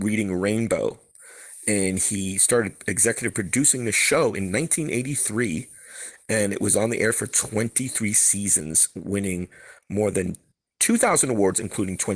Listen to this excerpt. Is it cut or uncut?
uncut